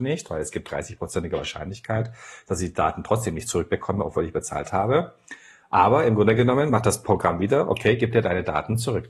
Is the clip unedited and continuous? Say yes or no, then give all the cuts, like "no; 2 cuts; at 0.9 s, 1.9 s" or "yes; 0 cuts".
yes; 0 cuts